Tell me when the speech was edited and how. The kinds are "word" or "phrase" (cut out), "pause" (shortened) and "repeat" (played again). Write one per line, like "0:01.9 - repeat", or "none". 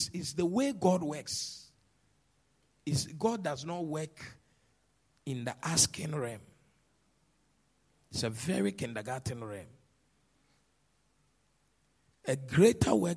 none